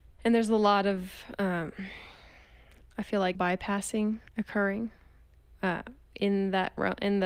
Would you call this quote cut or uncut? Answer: cut